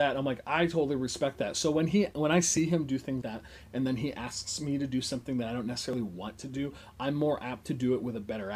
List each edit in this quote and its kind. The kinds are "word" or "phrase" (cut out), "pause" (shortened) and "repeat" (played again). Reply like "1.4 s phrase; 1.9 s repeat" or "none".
3.2 s word

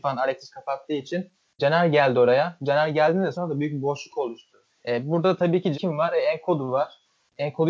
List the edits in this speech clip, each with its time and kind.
1.6 s word; 3.3 s word; 4.7 s pause; 5.7 s phrase

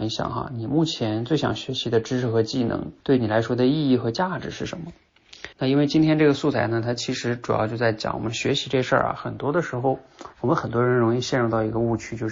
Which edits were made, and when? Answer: 3.0 s pause; 5.5 s pause; 10.3 s pause

